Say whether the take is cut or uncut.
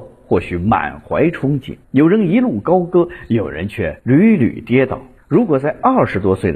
cut